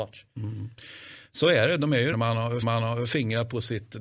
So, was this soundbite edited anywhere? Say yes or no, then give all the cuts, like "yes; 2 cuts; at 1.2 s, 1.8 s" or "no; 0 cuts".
yes; 2 cuts; at 2.1 s, 2.6 s